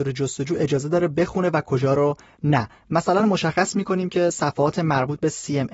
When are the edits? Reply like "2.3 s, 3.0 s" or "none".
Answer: none

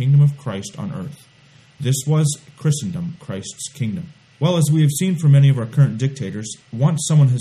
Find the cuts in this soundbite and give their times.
4.3 s

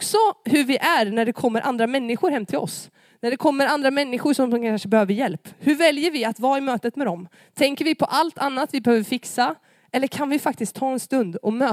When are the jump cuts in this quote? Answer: none

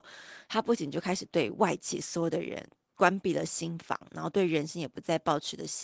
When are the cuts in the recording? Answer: none

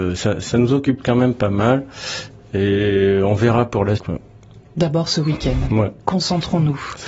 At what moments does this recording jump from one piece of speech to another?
4.0 s

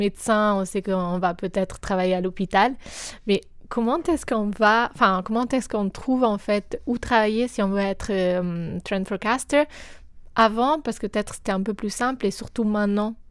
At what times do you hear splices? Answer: none

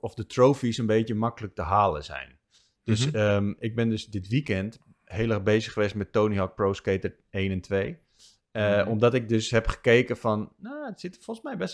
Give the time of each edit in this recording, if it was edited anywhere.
none

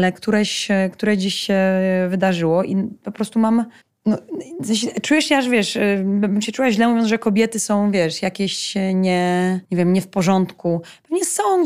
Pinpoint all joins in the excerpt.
3.8 s, 9.6 s

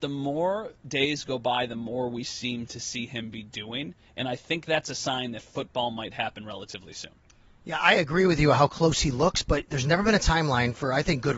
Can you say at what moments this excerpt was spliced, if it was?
none

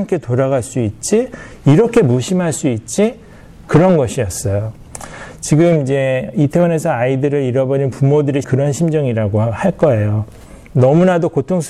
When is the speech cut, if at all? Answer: 8.4 s

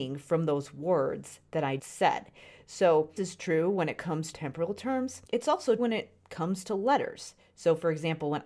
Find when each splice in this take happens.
1.8 s, 3.2 s, 4.3 s, 5.2 s, 5.8 s

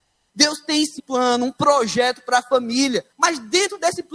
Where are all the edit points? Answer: 1.0 s, 3.1 s

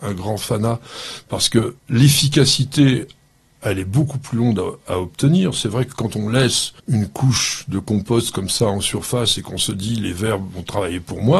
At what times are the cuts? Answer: 1.8 s, 6.8 s

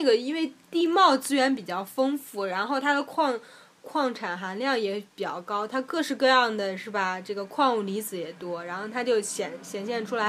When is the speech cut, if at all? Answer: none

